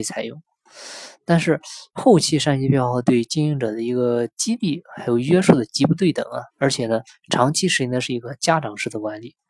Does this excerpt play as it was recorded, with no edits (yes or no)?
no